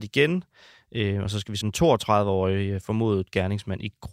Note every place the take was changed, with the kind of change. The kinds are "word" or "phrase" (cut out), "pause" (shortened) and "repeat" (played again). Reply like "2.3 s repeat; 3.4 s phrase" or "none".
1.6 s word